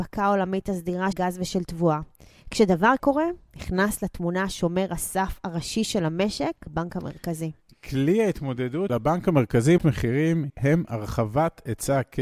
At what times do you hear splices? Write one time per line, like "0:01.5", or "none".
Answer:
0:01.1
0:03.0
0:06.7
0:08.9
0:09.8
0:10.5